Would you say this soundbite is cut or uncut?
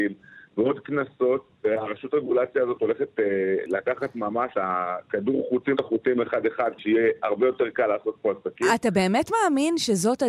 cut